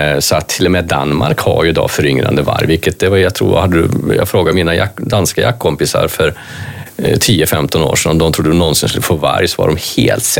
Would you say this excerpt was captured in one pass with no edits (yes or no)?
yes